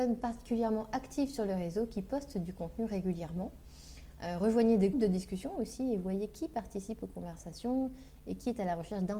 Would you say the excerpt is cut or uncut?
cut